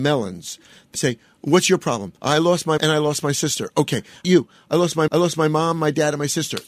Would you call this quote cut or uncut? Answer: cut